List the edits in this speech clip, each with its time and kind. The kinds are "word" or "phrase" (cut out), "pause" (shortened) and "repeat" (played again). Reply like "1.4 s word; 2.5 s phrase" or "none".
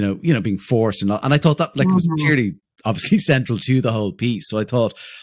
none